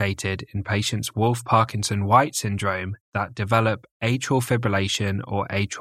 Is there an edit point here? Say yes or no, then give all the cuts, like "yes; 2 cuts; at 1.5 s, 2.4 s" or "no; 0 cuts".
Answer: yes; 2 cuts; at 1.1 s, 3.0 s